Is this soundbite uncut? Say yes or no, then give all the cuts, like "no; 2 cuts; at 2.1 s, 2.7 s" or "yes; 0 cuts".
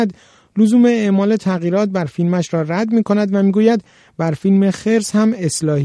yes; 0 cuts